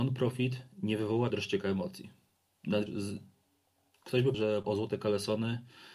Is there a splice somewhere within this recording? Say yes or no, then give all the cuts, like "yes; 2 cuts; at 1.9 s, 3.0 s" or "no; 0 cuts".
yes; 4 cuts; at 1.3 s, 2.9 s, 4.3 s, 4.6 s